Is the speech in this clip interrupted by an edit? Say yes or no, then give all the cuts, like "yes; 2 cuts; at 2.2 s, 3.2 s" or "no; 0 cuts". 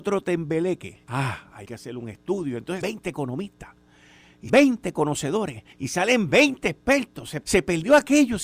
yes; 6 cuts; at 1.0 s, 1.6 s, 2.8 s, 4.5 s, 5.7 s, 7.4 s